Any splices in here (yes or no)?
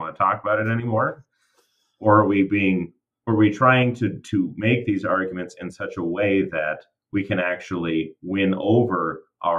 no